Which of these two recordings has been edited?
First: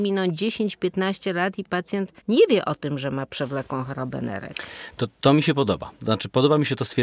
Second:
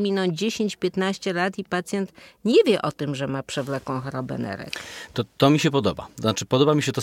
first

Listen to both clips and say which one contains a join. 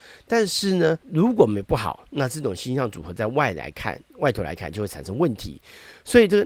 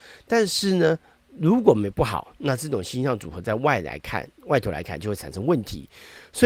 first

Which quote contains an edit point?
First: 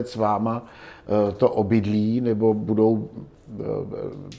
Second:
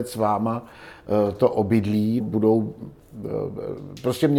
second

